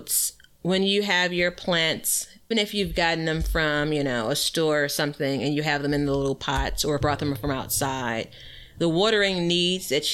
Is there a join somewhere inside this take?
yes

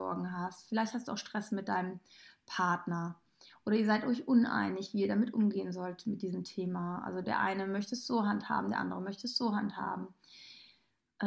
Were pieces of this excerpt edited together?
no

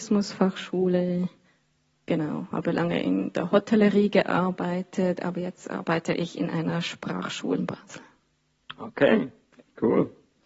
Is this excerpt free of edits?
no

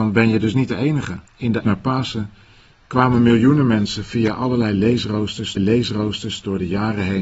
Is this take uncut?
no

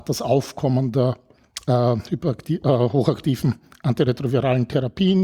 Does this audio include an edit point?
no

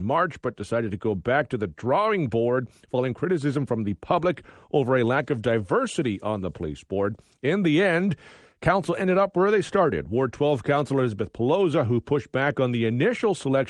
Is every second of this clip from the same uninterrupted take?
yes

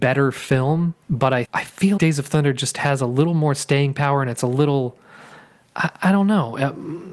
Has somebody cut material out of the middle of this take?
yes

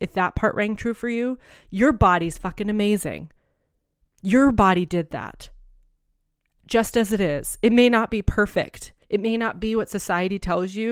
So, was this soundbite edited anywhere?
yes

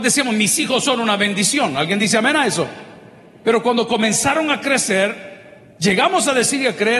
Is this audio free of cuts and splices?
yes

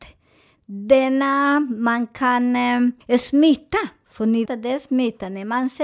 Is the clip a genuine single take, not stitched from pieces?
no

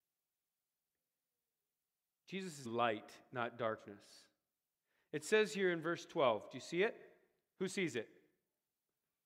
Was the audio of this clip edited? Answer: yes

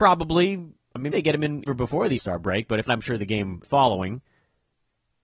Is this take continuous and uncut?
no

